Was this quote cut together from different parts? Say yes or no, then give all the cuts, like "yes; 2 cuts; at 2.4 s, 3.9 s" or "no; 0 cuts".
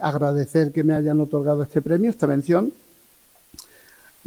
no; 0 cuts